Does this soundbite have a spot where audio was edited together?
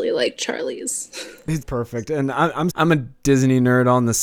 yes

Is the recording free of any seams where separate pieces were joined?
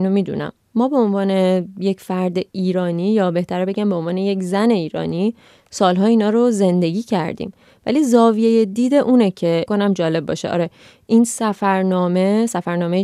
no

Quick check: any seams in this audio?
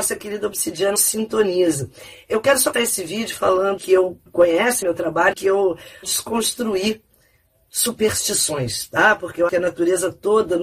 yes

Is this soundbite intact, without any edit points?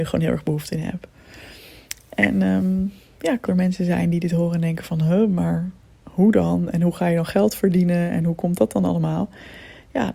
no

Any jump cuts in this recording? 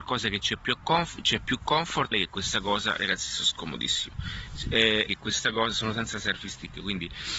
yes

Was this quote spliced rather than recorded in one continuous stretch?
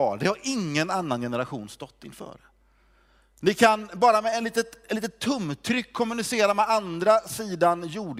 no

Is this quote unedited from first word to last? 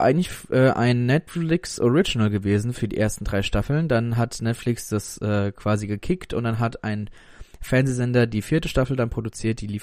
yes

